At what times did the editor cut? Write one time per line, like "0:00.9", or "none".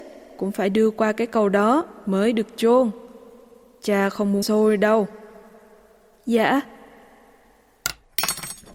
0:04.4